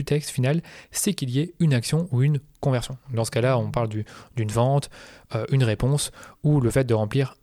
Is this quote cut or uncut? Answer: uncut